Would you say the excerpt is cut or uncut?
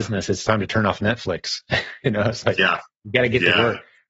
cut